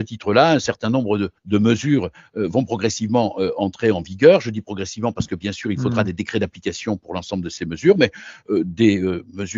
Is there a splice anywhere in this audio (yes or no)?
yes